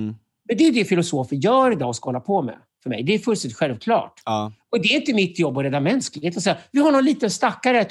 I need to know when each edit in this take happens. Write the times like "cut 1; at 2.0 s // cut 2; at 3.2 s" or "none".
none

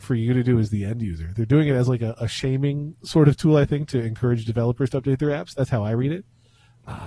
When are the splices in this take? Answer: none

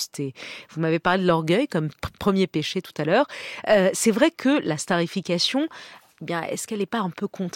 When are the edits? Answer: none

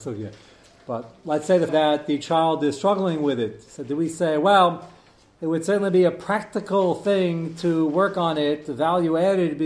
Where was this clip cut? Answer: cut 1; at 1.7 s

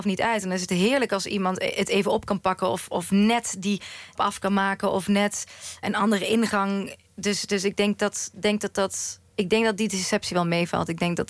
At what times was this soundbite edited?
cut 1; at 4.2 s // cut 2; at 5.8 s // cut 3; at 9.3 s

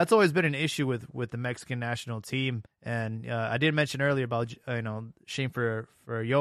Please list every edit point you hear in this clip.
cut 1; at 2.7 s

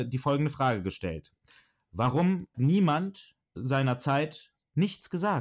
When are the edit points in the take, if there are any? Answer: cut 1; at 2.5 s // cut 2; at 3.6 s

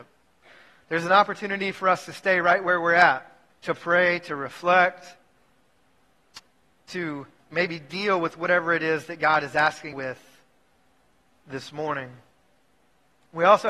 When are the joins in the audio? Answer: cut 1; at 3.5 s // cut 2; at 7.4 s // cut 3; at 9.9 s

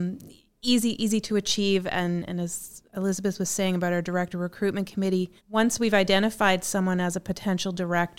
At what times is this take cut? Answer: cut 1; at 2.9 s // cut 2; at 5.4 s

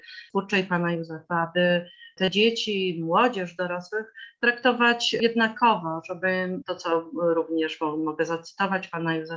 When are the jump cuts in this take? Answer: none

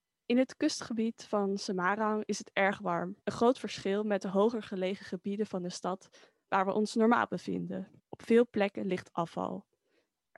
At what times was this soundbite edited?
cut 1; at 3.2 s // cut 2; at 8.0 s

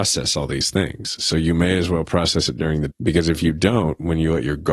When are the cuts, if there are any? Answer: cut 1; at 2.9 s

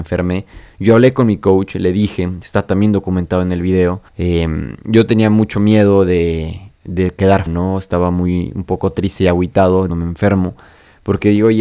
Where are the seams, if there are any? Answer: cut 1; at 4.1 s // cut 2; at 7.5 s // cut 3; at 9.9 s

